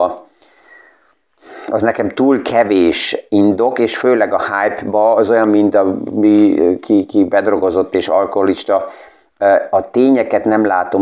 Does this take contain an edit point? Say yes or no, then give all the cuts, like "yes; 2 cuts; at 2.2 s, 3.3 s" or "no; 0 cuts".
no; 0 cuts